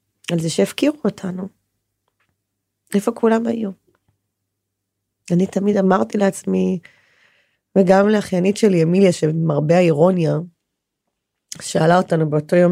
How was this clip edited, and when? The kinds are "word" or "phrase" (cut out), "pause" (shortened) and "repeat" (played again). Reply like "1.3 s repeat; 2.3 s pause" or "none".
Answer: none